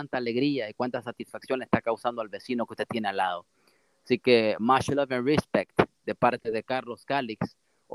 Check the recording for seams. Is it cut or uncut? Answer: uncut